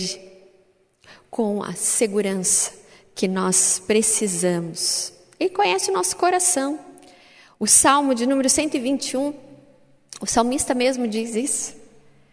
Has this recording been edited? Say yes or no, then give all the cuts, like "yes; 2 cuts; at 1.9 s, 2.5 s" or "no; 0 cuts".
no; 0 cuts